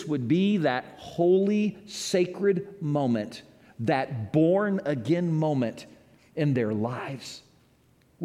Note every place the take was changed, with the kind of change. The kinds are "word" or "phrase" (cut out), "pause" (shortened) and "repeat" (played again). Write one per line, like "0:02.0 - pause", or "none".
none